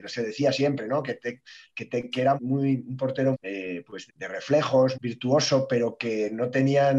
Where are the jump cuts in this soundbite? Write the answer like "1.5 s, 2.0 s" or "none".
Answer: 2.4 s, 3.3 s, 4.1 s, 4.9 s